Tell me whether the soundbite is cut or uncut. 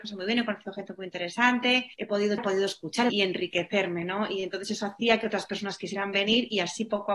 cut